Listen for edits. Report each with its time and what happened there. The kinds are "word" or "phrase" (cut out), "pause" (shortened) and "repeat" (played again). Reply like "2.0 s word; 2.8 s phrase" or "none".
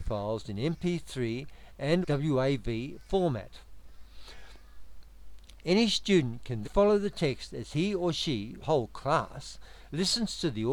2.0 s word; 6.6 s word; 8.6 s word